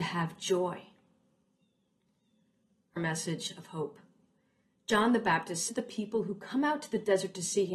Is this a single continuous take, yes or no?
no